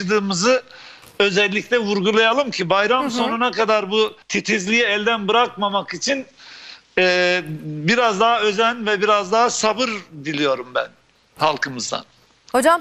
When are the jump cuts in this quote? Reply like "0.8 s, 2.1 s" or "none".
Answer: 4.2 s